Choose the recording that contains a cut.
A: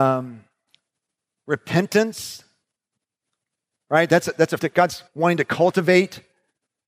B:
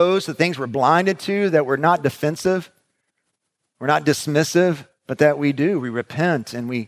A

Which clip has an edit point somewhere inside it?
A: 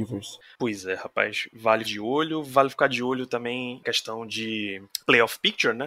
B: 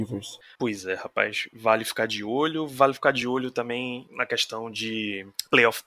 A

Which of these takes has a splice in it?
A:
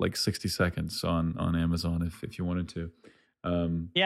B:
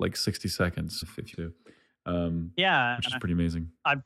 B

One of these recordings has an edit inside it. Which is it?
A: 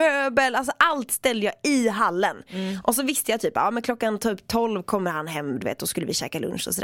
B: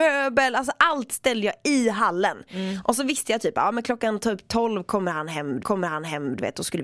B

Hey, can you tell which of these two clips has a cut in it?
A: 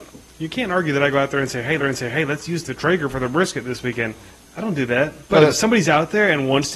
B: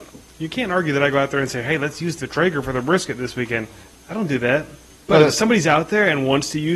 A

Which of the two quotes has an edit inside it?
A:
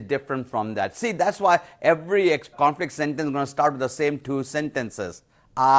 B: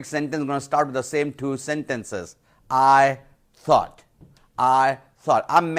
A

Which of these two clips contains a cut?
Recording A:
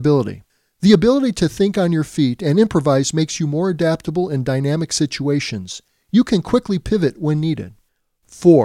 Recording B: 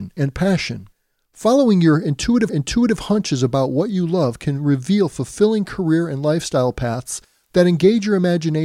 B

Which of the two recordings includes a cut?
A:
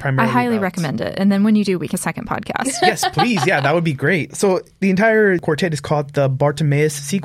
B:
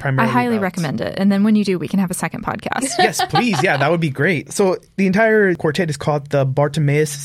A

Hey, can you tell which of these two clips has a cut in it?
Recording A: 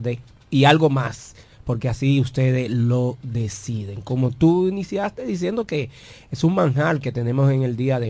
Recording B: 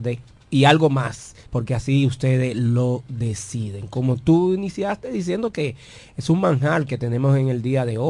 B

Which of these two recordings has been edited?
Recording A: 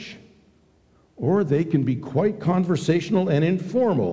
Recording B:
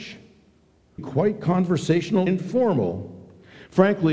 B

